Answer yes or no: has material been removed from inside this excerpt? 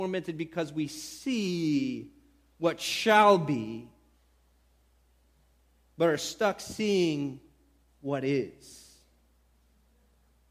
no